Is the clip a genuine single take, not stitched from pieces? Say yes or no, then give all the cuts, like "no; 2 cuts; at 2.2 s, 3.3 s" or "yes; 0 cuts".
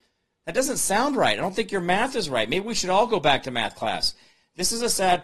yes; 0 cuts